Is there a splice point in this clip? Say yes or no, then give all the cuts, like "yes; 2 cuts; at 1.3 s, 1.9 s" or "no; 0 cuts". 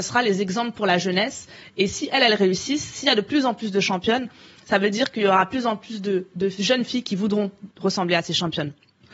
no; 0 cuts